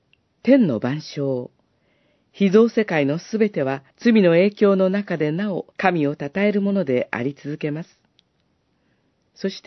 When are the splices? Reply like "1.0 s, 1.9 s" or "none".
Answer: 3.9 s, 5.7 s